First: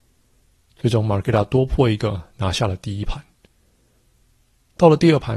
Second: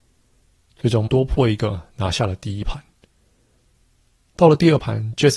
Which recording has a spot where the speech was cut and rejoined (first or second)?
second